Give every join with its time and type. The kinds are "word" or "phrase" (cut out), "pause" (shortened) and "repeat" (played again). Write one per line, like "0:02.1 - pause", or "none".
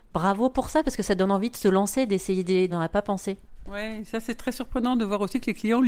0:02.7 - phrase